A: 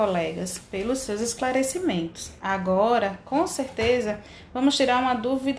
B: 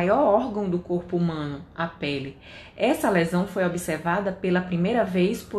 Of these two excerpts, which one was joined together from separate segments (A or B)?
A